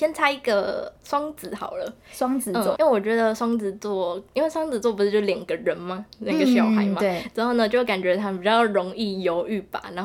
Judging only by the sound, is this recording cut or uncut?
cut